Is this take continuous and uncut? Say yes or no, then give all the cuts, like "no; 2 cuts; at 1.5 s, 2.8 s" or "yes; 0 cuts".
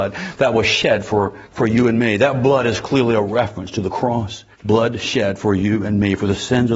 no; 2 cuts; at 1.4 s, 4.5 s